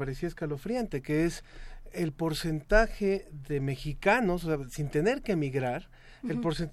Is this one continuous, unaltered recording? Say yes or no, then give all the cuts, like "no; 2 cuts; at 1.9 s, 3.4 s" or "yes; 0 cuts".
yes; 0 cuts